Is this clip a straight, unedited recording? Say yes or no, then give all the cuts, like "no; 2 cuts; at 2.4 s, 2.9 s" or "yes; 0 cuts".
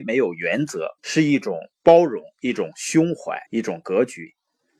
no; 2 cuts; at 1.0 s, 3.5 s